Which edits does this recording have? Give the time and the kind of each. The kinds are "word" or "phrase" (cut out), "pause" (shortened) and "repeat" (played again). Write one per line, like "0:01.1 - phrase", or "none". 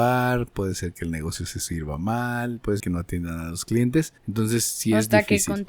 0:02.8 - word
0:04.2 - pause